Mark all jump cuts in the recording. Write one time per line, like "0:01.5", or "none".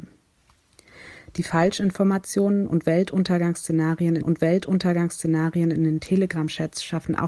0:04.2

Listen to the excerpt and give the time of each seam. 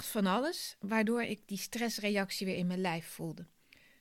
none

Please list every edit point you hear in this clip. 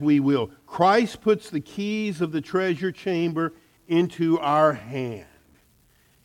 none

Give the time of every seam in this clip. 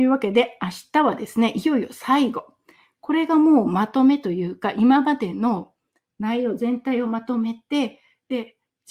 none

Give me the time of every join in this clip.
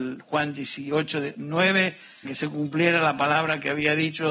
0:02.2

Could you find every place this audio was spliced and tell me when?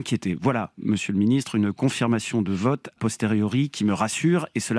0:03.0

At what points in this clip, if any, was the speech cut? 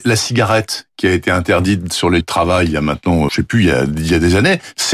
0:02.2
0:03.3

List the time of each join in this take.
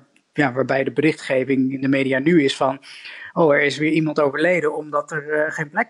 none

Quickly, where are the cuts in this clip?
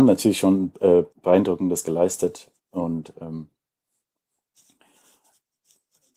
0:01.1
0:02.6

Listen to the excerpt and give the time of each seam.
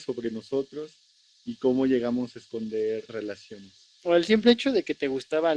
0:03.1
0:03.9

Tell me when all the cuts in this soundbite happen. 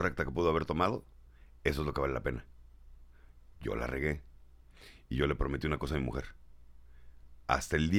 none

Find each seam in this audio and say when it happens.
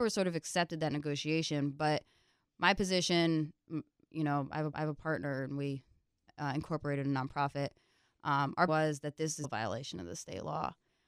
0:04.7
0:08.7
0:09.4

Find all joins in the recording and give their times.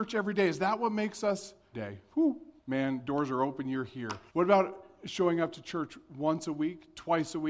0:01.7
0:02.6
0:04.3

